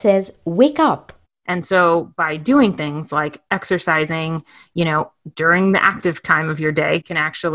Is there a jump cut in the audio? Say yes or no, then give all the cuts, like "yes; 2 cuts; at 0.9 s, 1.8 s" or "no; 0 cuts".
no; 0 cuts